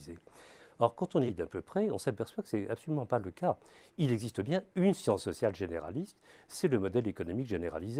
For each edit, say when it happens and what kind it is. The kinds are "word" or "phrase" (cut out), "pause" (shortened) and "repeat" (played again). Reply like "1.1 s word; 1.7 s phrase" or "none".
1.3 s word